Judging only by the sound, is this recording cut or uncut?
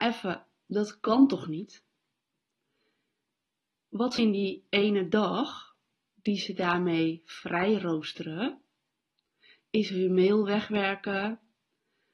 cut